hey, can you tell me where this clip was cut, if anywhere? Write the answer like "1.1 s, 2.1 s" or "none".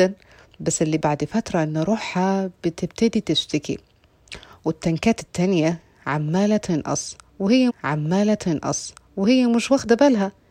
1.0 s, 7.7 s